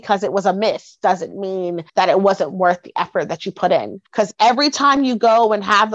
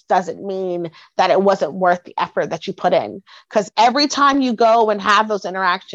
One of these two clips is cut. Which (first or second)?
first